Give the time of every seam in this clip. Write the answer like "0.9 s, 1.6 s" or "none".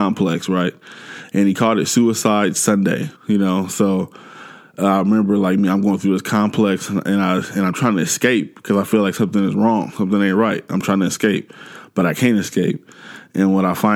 3.2 s